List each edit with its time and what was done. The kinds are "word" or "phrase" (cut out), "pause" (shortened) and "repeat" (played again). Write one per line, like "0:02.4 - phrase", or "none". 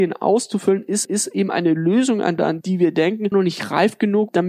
0:01.0 - repeat
0:02.4 - phrase
0:03.3 - word